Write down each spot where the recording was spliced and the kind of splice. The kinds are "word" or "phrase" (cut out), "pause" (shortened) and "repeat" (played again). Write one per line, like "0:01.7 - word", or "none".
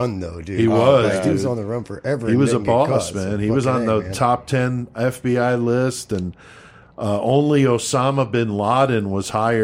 none